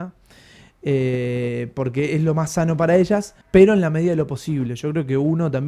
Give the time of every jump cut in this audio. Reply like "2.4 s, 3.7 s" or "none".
3.4 s